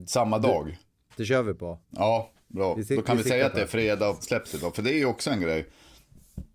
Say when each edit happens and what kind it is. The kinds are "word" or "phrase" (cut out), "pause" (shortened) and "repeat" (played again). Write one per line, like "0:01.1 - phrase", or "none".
0:01.8 - pause
0:04.2 - word